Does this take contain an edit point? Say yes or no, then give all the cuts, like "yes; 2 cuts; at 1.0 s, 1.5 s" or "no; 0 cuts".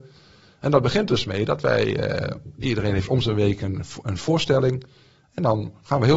no; 0 cuts